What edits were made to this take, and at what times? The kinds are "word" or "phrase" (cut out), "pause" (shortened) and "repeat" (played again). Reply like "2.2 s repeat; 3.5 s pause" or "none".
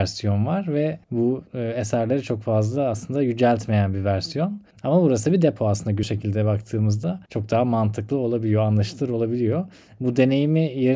1.0 s pause; 4.7 s pause; 6.0 s phrase; 7.3 s pause